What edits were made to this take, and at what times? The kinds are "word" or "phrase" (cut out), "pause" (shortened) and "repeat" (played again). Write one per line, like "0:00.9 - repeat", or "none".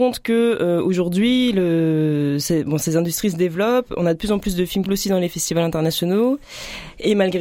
0:04.9 - phrase